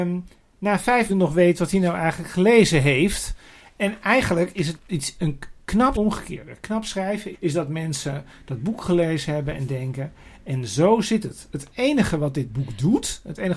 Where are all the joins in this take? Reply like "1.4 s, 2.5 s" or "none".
1.1 s, 4.8 s, 5.9 s, 7.3 s